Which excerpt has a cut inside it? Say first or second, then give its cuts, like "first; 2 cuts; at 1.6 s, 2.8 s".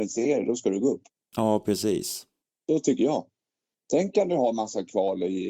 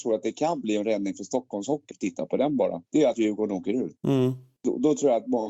second; 3 cuts; at 1.9 s, 2.9 s, 4.0 s